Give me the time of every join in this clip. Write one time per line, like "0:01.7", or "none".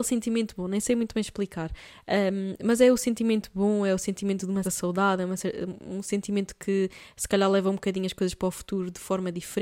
0:04.6